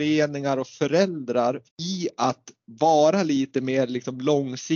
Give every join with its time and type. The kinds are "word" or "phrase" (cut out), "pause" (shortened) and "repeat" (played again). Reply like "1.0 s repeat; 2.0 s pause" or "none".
1.7 s pause